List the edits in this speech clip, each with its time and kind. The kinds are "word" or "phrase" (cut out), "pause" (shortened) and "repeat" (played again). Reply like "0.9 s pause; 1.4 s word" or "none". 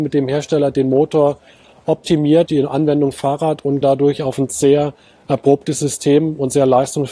2.5 s word; 3.8 s word